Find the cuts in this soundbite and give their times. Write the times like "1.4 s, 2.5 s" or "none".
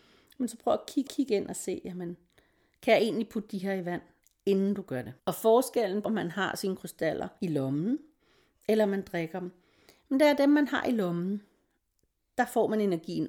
1.1 s, 5.2 s, 6.0 s, 7.4 s

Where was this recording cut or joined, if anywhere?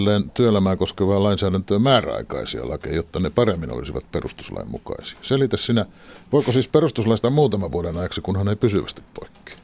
7.2 s

